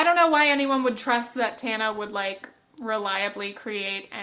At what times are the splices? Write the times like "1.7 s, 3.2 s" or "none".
none